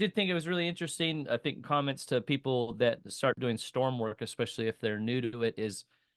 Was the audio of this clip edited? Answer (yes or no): no